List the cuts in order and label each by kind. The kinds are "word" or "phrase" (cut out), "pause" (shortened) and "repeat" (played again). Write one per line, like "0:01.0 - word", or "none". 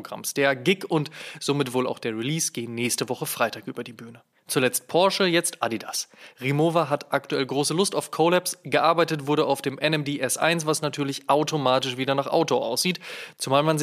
0:04.4 - pause